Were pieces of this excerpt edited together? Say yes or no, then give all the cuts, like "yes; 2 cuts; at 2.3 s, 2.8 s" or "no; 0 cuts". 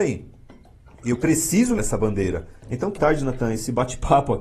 yes; 3 cuts; at 1.8 s, 2.6 s, 3.0 s